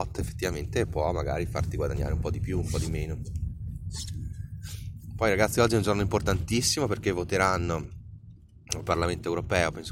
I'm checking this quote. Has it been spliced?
no; 0 cuts

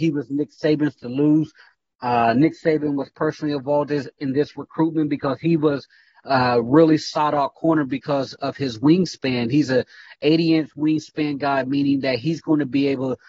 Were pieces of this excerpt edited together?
no; 0 cuts

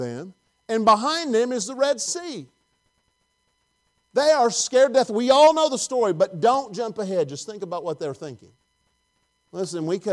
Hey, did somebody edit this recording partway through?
no; 0 cuts

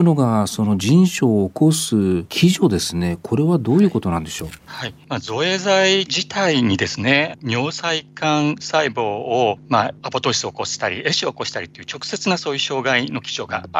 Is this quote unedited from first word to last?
yes; 0 cuts

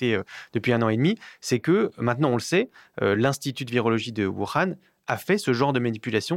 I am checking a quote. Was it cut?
no; 0 cuts

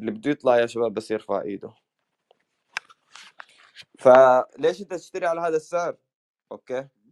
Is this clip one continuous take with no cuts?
no; 1 cut; at 4.5 s

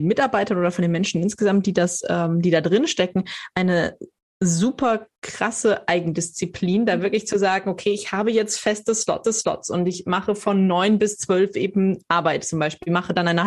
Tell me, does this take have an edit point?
yes; 2 cuts; at 5.2 s, 9.2 s

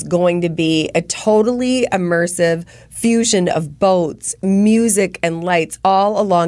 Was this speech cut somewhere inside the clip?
no; 0 cuts

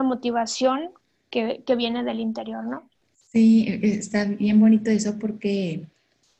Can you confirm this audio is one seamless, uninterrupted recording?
yes; 0 cuts

